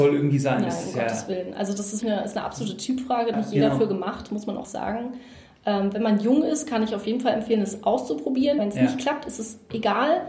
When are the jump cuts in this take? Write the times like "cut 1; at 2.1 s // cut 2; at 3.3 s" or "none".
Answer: cut 1; at 2.0 s // cut 2; at 3.3 s // cut 3; at 4.6 s // cut 4; at 8.6 s